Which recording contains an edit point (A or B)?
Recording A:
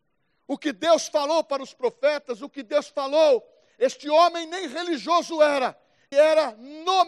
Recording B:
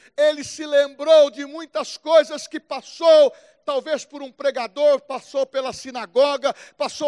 A